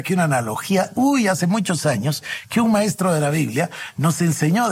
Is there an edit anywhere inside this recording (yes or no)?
no